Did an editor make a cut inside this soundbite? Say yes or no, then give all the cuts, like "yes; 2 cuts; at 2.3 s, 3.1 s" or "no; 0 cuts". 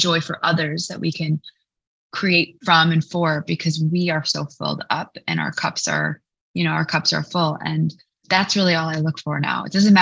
no; 0 cuts